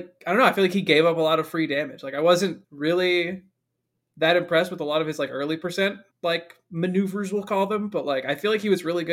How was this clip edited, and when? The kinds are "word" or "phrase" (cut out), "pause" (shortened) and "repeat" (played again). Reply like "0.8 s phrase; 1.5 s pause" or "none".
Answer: 2.6 s pause; 6.1 s pause